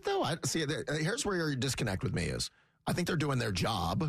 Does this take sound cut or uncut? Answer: uncut